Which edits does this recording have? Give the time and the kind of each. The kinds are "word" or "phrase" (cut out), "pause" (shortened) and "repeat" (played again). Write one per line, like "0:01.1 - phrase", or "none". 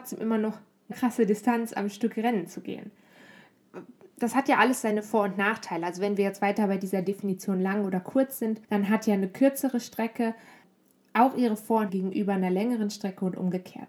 0:00.9 - word
0:08.6 - pause
0:11.9 - word